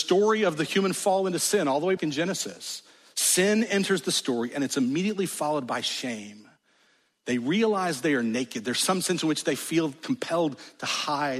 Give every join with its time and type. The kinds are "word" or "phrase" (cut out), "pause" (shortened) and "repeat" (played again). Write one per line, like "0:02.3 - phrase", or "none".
0:02.0 - word